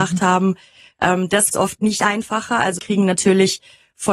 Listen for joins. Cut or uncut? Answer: cut